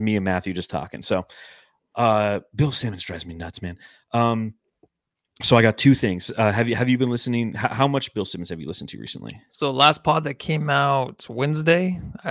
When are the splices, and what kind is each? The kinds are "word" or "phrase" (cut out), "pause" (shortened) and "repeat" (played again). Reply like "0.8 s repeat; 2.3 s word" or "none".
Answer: none